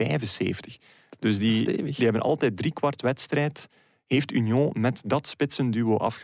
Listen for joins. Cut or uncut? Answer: uncut